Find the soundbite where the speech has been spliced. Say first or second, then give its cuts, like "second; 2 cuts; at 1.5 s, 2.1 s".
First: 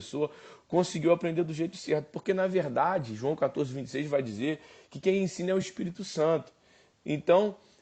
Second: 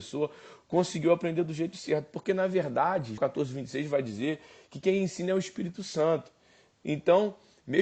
second; 1 cut; at 3.2 s